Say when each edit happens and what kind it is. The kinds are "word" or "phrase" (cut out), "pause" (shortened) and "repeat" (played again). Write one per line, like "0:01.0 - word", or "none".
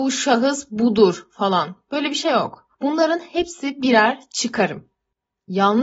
0:02.7 - pause